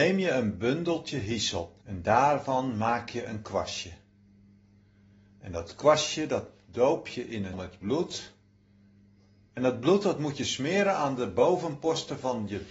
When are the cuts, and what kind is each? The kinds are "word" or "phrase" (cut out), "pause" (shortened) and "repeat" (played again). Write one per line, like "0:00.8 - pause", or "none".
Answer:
0:01.8 - pause
0:07.5 - word